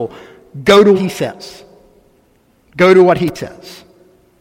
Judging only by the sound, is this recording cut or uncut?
cut